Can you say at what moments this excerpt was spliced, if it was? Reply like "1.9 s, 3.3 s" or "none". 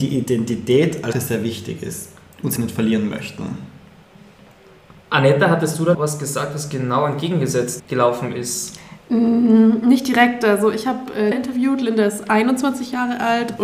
1.1 s, 2.6 s, 5.9 s, 7.8 s, 11.3 s